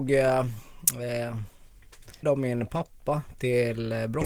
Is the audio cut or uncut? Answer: cut